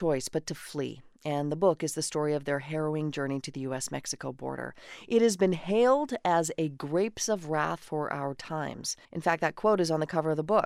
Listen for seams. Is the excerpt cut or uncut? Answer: cut